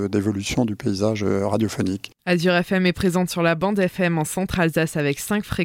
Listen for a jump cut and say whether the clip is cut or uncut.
uncut